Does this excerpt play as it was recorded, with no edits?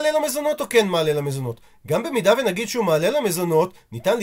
yes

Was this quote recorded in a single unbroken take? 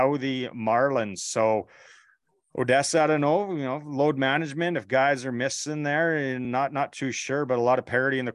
yes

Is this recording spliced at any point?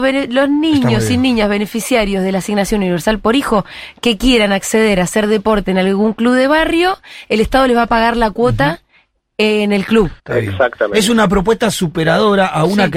yes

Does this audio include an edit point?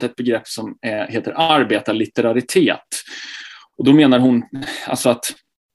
no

